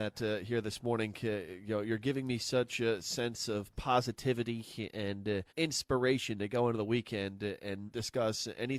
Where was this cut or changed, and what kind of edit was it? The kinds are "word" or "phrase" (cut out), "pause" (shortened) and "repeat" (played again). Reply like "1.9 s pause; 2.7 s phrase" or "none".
5.5 s pause; 7.9 s word